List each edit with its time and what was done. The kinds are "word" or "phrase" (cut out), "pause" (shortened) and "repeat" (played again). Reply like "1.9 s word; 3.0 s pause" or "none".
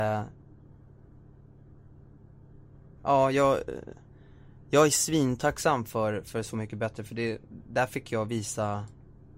none